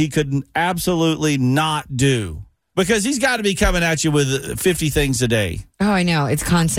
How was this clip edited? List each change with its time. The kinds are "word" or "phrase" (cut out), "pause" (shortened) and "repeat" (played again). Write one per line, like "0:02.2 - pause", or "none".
none